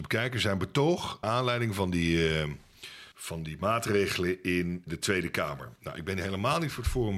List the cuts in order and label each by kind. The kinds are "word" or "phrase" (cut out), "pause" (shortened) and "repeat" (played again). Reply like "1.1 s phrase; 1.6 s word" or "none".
1.2 s word; 3.1 s pause; 4.9 s word